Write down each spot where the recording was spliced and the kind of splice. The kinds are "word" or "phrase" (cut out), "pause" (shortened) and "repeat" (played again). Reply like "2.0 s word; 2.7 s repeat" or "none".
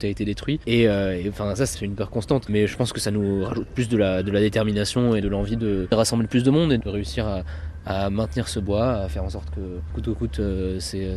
none